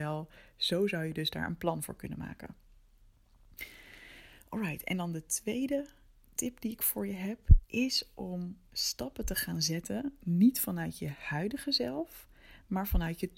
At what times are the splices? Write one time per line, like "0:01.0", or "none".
0:08.7